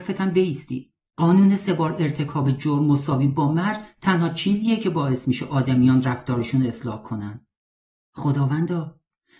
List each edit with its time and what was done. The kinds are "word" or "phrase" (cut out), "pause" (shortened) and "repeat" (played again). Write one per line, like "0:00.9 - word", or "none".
none